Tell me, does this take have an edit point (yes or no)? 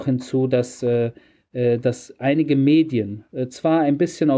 no